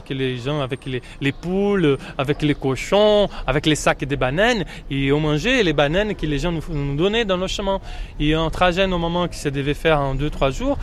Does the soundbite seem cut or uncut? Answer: uncut